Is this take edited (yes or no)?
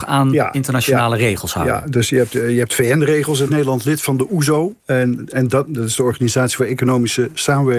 yes